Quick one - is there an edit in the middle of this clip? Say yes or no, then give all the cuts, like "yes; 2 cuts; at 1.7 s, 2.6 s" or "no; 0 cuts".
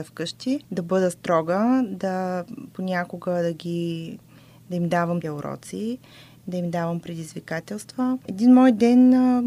yes; 1 cut; at 5.2 s